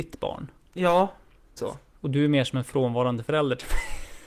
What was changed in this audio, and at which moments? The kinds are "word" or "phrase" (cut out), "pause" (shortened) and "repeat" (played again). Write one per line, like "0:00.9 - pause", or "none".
0:01.6 - word